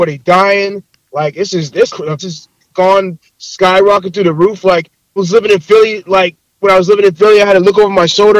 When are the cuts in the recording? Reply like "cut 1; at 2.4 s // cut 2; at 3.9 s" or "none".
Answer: cut 1; at 1.9 s // cut 2; at 2.2 s // cut 3; at 5.2 s